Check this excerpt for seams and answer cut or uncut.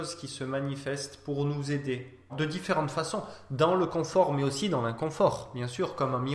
cut